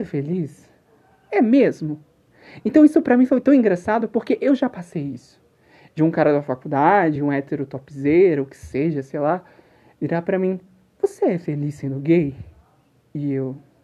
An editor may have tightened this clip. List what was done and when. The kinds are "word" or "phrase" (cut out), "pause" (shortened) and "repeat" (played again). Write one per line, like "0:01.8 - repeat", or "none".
none